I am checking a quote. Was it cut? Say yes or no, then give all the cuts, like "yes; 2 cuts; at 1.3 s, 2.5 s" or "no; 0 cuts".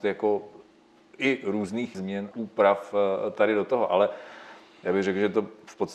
yes; 2 cuts; at 1.9 s, 2.3 s